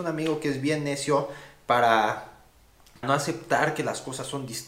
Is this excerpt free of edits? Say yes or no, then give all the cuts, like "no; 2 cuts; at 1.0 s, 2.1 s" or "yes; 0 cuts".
no; 1 cut; at 3.0 s